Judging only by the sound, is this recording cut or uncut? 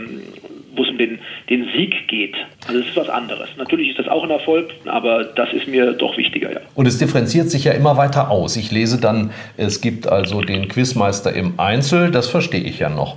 cut